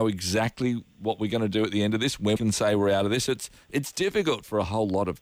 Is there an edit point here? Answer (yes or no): yes